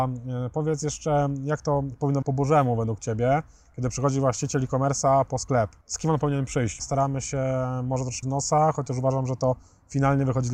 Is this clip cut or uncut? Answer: cut